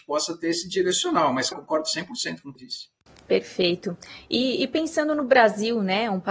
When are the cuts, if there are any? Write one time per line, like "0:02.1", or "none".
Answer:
0:01.5
0:02.6